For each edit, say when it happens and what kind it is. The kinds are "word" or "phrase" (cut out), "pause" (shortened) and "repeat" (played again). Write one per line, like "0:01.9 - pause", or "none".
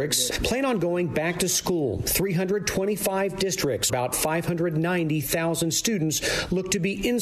0:03.9 - word